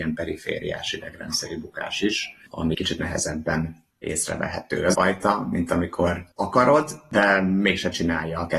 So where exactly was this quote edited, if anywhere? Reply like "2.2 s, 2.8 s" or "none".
2.7 s, 3.9 s, 4.9 s, 6.3 s